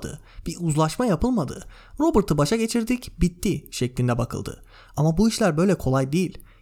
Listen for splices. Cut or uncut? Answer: uncut